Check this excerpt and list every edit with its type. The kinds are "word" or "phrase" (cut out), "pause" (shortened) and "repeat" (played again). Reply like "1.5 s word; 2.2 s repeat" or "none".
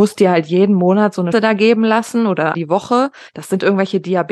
1.3 s word; 2.5 s word